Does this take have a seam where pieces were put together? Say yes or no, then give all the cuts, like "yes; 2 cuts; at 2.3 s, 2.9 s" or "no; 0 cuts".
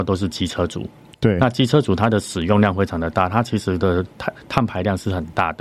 no; 0 cuts